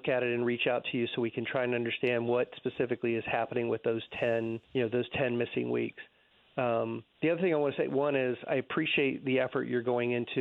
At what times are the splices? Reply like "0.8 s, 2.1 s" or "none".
4.6 s, 7.1 s